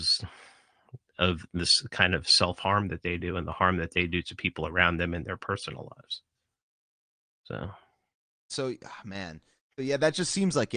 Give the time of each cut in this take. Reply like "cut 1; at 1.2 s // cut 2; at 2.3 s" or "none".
none